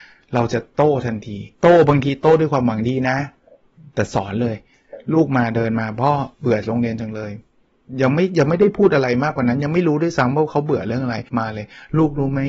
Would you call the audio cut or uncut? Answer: cut